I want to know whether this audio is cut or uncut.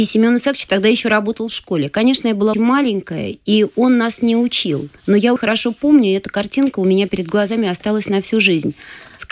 cut